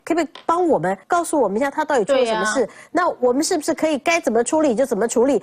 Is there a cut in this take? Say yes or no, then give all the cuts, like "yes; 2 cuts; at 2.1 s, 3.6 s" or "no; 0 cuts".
yes; 1 cut; at 1.0 s